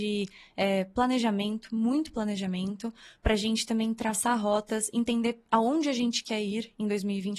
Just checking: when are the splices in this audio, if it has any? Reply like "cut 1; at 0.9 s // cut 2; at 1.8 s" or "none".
none